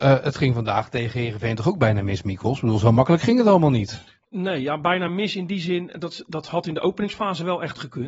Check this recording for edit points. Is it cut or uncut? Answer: uncut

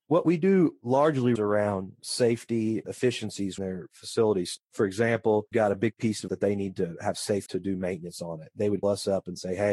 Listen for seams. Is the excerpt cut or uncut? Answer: cut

